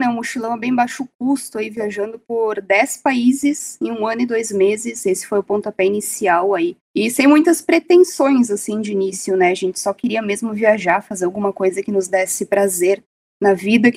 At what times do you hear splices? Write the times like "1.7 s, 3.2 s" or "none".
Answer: 6.8 s